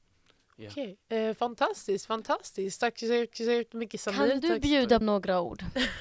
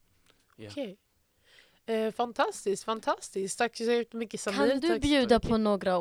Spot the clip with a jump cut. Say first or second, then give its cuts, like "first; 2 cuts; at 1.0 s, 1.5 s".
first; 3 cuts; at 1.0 s, 3.3 s, 5.0 s